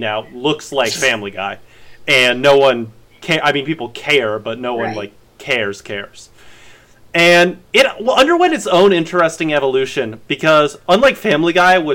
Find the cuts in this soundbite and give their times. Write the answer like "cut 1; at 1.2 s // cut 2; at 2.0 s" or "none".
none